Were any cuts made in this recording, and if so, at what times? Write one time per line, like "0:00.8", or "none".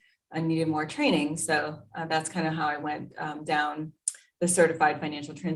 none